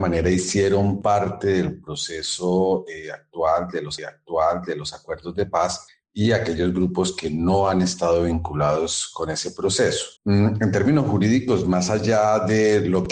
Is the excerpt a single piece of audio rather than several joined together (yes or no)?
no